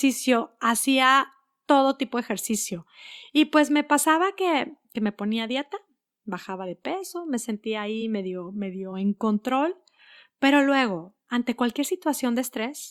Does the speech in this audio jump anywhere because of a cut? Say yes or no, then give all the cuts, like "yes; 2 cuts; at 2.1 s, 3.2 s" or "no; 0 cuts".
no; 0 cuts